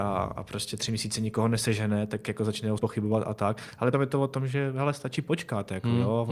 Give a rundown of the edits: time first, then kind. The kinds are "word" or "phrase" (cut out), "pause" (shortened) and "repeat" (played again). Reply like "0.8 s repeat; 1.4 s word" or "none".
2.8 s word; 3.9 s word